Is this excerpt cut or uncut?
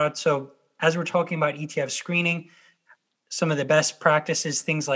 uncut